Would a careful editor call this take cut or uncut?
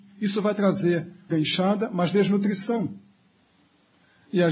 cut